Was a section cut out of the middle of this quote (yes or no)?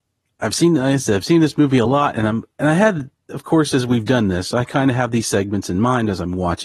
no